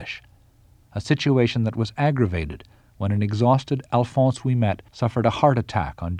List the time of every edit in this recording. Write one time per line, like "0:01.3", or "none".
0:04.9